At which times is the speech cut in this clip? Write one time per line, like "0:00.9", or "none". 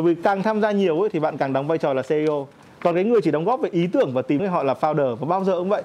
0:04.4